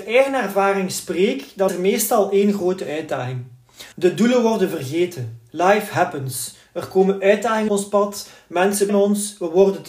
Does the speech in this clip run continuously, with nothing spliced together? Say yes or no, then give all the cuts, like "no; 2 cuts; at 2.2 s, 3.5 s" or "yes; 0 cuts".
no; 4 cuts; at 1.7 s, 3.9 s, 7.7 s, 8.9 s